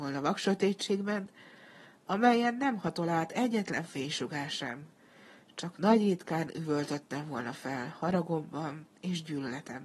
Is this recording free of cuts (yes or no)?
yes